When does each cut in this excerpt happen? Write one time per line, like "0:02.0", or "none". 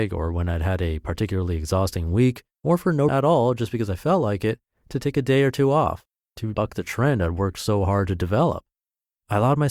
0:02.5
0:03.1
0:06.5